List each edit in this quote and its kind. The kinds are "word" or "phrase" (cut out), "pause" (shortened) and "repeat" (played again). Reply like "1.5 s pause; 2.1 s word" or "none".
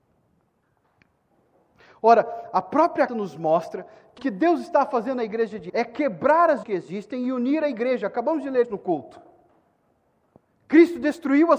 3.1 s word; 4.2 s word; 5.7 s word; 6.6 s word; 8.6 s word

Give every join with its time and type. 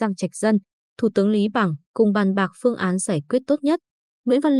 1.8 s pause

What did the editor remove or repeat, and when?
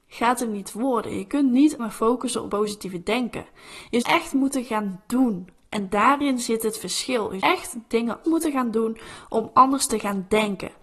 1.8 s word; 2.5 s word; 4.0 s word; 7.4 s word; 8.2 s word

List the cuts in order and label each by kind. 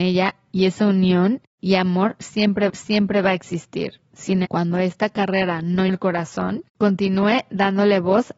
2.7 s repeat; 4.4 s word; 5.9 s word; 6.7 s pause

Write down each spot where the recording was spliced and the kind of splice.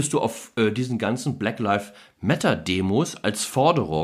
none

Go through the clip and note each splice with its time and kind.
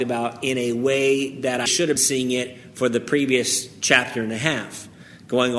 1.7 s word; 2.0 s word

